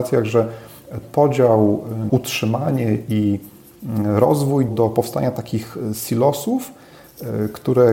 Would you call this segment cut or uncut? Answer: cut